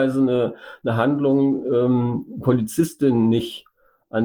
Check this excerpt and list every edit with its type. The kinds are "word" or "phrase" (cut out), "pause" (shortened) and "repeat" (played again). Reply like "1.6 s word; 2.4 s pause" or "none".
none